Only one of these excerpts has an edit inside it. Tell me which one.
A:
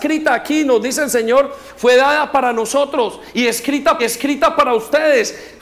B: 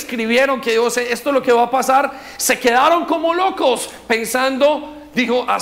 A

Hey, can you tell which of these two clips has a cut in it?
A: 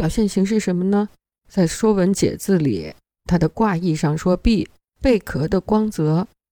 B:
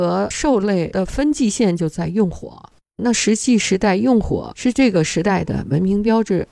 B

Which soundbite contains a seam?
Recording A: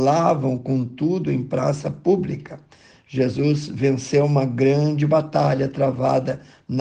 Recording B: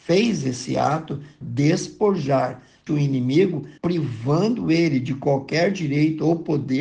B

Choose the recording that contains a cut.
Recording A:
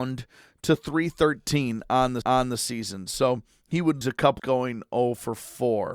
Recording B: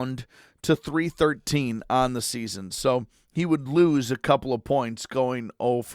A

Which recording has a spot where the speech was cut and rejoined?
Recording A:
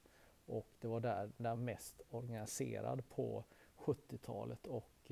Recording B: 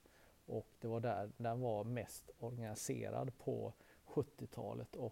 A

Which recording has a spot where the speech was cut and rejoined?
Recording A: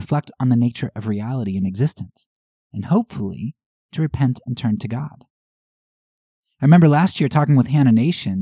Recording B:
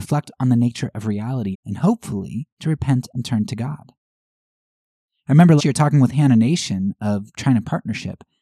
B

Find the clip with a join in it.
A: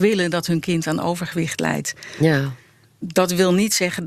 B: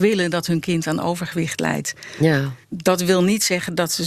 B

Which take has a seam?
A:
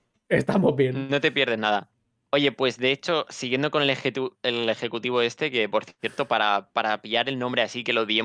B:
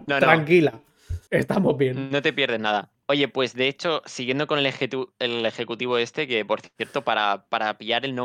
B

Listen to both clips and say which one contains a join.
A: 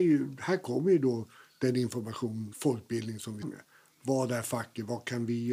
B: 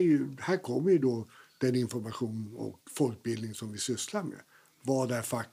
A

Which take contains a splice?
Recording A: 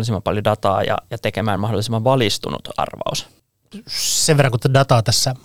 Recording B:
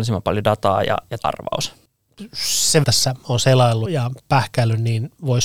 B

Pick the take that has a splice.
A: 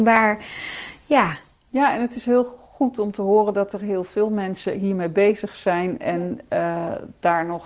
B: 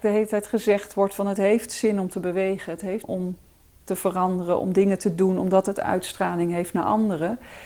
B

